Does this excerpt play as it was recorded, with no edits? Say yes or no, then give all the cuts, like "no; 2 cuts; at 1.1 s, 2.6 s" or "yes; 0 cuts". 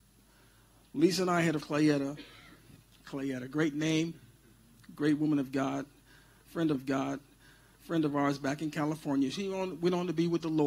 no; 2 cuts; at 1.6 s, 6.7 s